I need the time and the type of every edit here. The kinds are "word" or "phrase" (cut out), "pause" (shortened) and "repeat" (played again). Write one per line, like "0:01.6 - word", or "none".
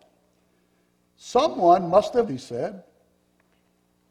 0:02.3 - phrase